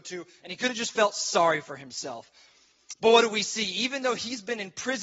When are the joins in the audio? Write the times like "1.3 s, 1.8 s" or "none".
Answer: none